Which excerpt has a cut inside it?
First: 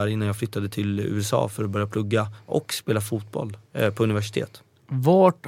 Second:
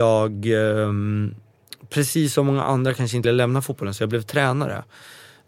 second; 1 cut; at 3.2 s

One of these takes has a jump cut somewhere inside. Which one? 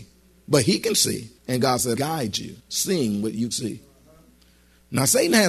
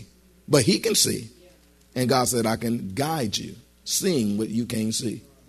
first; 4 cuts; at 1.4 s, 2.0 s, 2.6 s, 3.5 s

